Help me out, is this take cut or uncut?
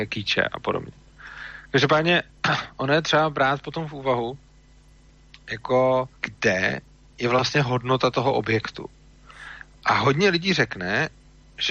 cut